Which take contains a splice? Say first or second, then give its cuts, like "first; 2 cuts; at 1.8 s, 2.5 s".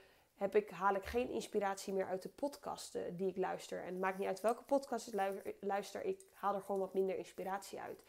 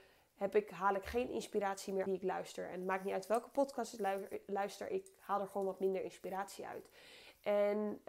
second; 1 cut; at 2.1 s